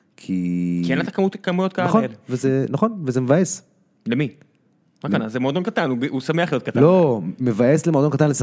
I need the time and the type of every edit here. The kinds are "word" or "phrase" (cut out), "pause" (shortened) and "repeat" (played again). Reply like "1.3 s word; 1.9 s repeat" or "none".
none

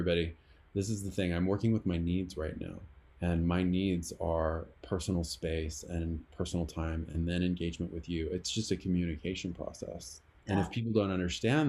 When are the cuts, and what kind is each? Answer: 3.1 s pause; 10.4 s pause

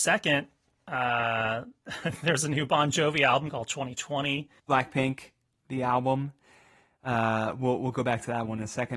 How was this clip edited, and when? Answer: none

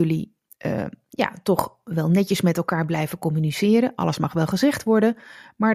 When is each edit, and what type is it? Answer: none

